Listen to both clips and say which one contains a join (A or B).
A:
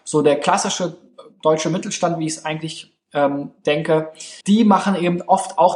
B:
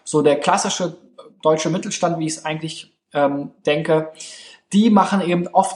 A